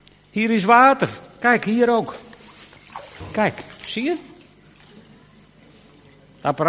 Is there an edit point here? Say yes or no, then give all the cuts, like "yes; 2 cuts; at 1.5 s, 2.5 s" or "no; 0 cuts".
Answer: no; 0 cuts